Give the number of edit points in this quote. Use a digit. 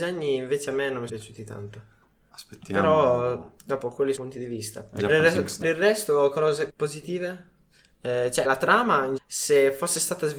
7